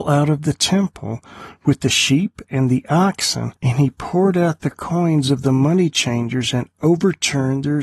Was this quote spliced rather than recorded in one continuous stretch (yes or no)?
yes